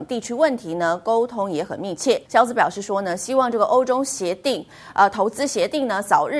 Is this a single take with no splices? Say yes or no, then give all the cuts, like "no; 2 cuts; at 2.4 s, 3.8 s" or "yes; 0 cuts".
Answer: no; 1 cut; at 2.3 s